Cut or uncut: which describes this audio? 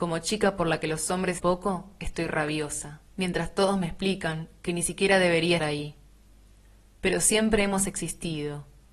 cut